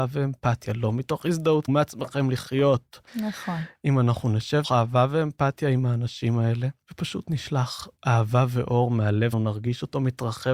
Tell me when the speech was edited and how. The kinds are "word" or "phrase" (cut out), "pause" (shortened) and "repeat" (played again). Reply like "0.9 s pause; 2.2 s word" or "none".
1.7 s phrase; 3.1 s pause; 4.6 s word; 6.8 s pause; 8.0 s pause; 9.3 s word